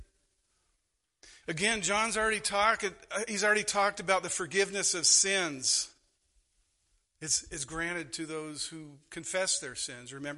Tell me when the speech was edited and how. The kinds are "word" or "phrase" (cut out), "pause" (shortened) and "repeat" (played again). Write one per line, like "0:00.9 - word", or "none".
0:01.4 - pause